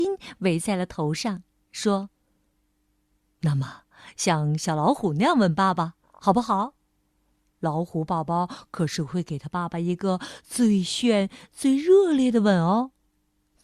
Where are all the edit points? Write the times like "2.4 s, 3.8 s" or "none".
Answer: none